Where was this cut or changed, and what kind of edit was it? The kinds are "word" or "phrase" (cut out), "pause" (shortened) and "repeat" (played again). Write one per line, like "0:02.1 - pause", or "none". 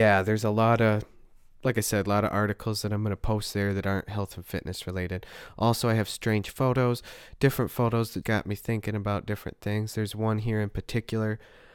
0:08.2 - word